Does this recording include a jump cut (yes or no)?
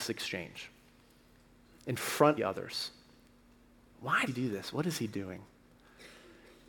yes